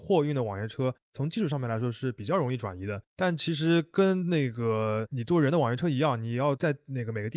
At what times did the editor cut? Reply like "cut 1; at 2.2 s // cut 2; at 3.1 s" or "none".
cut 1; at 3.1 s